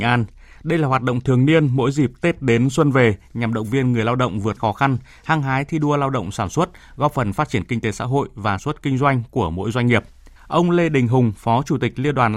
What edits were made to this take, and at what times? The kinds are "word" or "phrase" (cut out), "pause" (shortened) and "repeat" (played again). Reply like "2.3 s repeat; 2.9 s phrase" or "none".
4.6 s word; 8.6 s word; 10.4 s pause